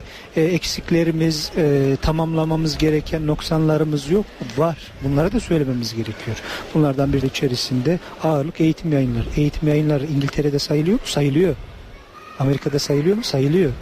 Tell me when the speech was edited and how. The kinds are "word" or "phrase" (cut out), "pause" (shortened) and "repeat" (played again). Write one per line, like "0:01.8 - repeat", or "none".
0:07.2 - phrase